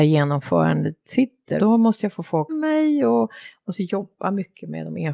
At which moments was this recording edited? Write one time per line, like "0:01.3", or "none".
0:01.6
0:02.5